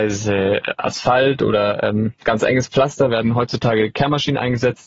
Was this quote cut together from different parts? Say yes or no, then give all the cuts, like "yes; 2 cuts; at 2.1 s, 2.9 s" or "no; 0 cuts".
no; 0 cuts